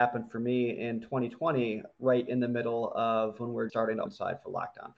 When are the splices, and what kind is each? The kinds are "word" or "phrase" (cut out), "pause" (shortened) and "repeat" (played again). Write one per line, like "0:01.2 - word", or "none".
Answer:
0:03.7 - word
0:04.1 - phrase